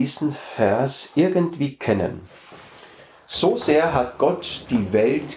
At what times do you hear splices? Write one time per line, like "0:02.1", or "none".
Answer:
none

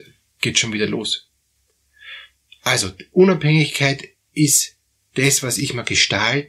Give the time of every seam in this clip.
none

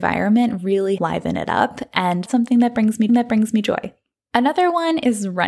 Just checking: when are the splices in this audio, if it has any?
0:01.0
0:02.3
0:03.1

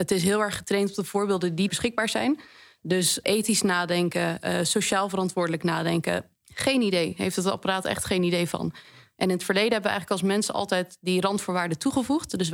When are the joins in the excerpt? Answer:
0:01.7
0:03.2

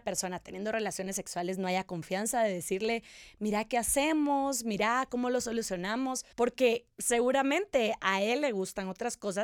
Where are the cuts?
0:06.3

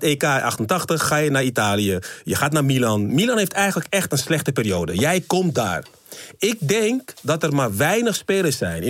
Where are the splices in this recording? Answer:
none

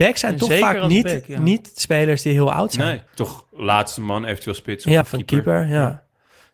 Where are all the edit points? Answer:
0:03.1
0:05.0

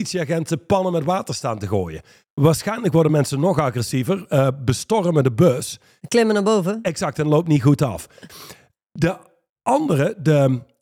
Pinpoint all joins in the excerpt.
none

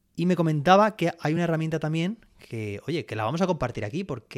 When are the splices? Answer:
none

